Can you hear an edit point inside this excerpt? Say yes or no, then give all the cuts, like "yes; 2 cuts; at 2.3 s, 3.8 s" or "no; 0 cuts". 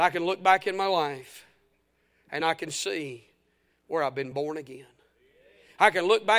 no; 0 cuts